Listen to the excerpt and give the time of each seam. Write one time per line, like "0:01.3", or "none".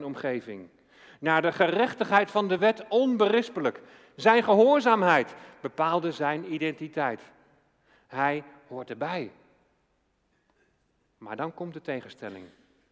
none